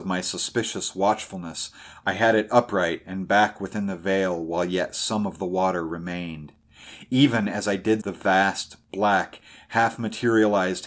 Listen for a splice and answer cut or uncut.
cut